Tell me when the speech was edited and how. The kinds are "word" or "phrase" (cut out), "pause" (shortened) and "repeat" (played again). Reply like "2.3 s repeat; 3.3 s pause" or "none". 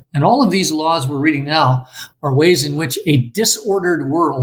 none